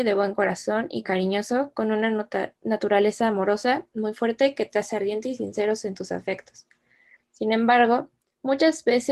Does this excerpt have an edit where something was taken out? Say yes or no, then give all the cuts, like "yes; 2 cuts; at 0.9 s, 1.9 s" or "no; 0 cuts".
no; 0 cuts